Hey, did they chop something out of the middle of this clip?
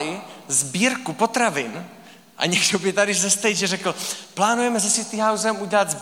no; 0 cuts

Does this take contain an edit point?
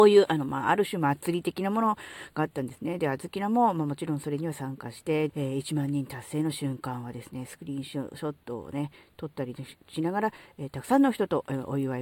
yes; 1 cut; at 5.3 s

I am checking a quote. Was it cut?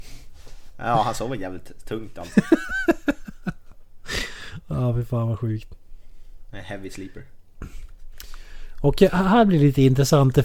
no; 0 cuts

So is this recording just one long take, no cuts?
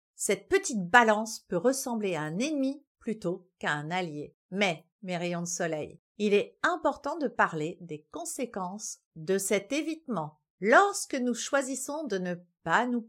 no; 3 cuts; at 4.4 s, 6.1 s, 10.5 s

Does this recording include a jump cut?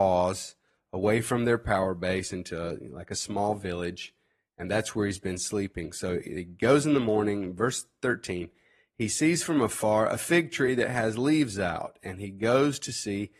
no; 0 cuts

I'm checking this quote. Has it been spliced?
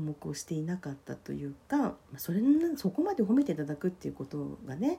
yes; 1 cut; at 2.0 s

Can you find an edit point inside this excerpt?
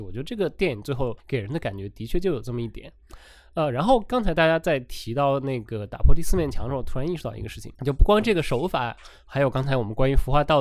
yes; 2 cuts; at 1.2 s, 7.7 s

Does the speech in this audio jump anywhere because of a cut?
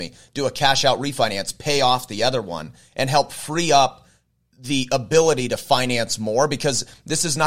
no; 0 cuts

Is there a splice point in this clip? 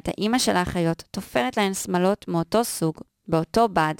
no; 0 cuts

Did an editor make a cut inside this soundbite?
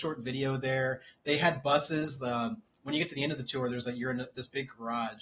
no; 0 cuts

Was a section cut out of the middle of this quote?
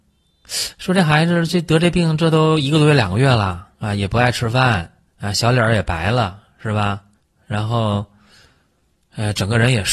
yes; 3 cuts; at 3.7 s, 5.1 s, 7.1 s

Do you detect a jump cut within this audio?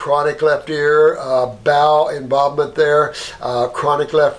no; 0 cuts

